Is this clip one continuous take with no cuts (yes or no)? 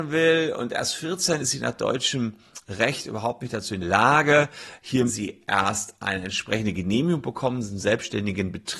no